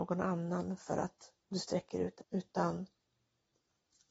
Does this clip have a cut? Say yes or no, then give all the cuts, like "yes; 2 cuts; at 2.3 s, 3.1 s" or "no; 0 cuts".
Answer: yes; 1 cut; at 2.2 s